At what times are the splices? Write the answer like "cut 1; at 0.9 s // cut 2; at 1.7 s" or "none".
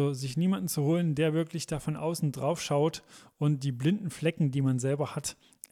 none